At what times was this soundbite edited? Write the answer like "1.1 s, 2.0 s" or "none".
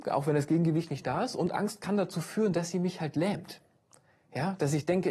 none